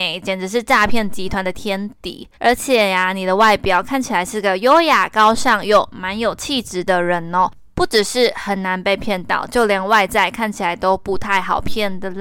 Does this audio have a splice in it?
yes; 1 cut; at 2.3 s

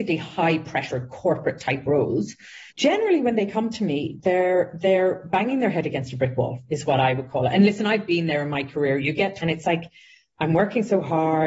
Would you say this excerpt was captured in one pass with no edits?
no; 2 cuts; at 2.7 s, 9.4 s

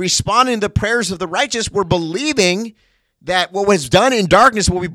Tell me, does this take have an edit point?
no; 0 cuts

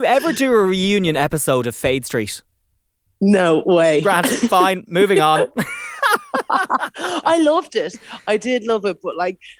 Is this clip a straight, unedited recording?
yes; 0 cuts

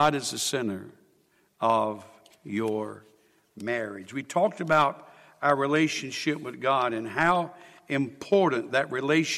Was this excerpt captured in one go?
yes; 0 cuts

